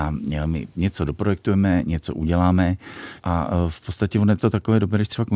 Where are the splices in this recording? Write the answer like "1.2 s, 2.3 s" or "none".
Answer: 3.2 s